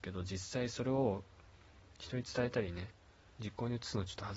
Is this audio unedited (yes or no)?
yes